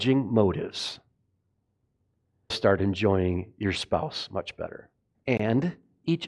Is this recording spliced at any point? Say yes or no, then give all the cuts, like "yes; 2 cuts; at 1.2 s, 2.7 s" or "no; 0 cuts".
yes; 2 cuts; at 2.5 s, 5.1 s